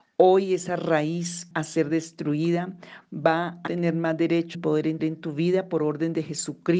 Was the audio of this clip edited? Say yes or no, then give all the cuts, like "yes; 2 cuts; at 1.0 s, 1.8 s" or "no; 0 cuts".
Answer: yes; 4 cuts; at 1.5 s, 3.7 s, 4.5 s, 5.0 s